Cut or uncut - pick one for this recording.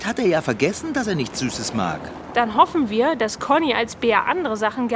uncut